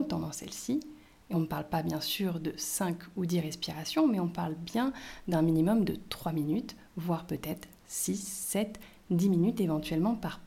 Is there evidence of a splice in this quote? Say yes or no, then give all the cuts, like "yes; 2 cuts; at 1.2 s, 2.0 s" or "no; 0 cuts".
no; 0 cuts